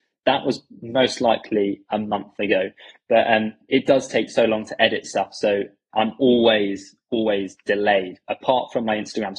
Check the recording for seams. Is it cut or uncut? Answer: uncut